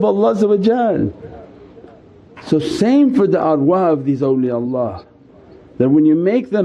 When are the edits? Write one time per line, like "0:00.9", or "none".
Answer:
none